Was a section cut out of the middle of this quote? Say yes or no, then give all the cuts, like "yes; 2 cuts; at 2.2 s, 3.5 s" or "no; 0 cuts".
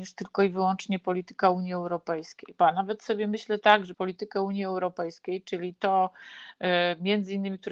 yes; 1 cut; at 3.9 s